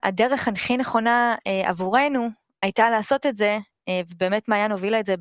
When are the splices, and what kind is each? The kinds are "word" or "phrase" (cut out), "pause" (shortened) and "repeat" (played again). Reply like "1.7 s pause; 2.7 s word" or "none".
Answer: none